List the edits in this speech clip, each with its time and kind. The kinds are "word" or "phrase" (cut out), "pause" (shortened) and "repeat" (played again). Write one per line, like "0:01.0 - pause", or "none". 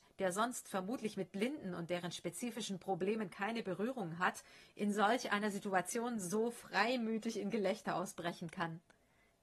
none